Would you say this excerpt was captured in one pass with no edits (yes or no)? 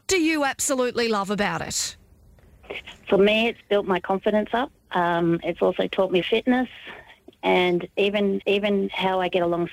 no